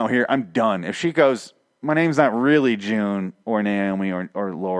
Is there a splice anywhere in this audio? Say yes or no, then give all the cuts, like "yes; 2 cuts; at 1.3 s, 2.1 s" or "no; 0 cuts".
no; 0 cuts